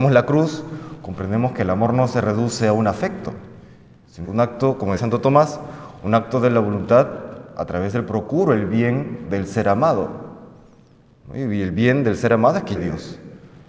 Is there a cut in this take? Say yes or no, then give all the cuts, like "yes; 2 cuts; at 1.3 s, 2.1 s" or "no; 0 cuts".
yes; 4 cuts; at 4.2 s, 5.0 s, 8.1 s, 12.7 s